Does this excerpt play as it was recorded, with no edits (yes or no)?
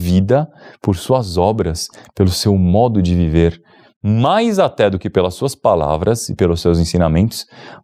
yes